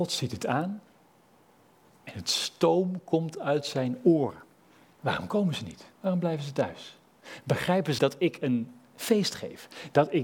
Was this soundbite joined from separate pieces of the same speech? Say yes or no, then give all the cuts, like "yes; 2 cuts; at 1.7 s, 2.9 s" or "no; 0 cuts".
yes; 3 cuts; at 4.6 s, 5.9 s, 8.0 s